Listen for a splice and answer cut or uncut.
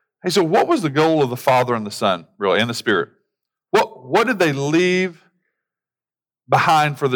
uncut